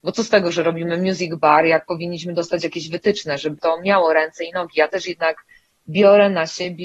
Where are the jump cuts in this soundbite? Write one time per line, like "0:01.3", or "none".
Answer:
none